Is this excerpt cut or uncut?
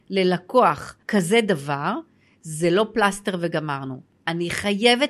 cut